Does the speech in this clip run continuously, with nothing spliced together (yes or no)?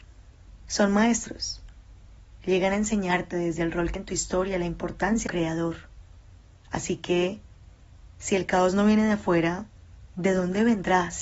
no